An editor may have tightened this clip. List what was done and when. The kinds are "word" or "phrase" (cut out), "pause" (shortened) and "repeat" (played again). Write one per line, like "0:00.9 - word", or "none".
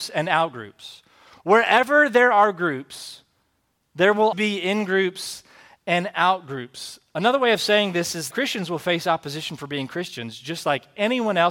0:04.3 - word
0:08.3 - word